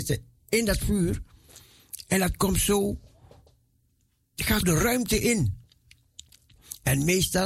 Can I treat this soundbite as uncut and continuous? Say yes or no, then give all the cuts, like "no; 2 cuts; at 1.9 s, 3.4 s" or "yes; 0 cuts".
no; 1 cut; at 4.6 s